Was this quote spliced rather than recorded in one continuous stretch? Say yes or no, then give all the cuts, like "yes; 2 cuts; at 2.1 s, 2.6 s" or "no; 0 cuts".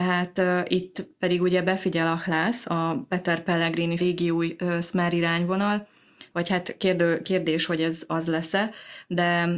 yes; 2 cuts; at 2.6 s, 4.0 s